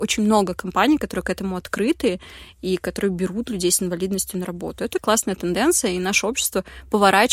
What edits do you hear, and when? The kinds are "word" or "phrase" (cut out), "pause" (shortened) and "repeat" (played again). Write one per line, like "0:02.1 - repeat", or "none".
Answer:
none